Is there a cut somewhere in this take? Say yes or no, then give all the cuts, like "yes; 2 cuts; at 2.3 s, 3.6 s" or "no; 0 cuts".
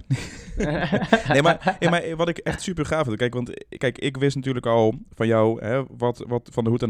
no; 0 cuts